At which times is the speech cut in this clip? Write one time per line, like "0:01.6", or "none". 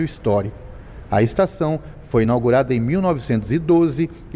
none